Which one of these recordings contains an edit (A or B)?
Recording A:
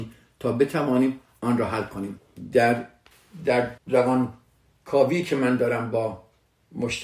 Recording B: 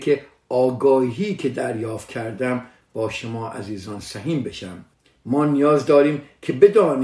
A